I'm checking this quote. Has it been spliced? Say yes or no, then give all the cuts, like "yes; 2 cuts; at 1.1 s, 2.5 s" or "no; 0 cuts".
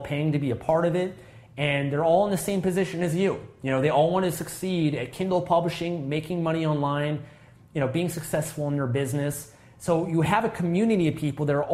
no; 0 cuts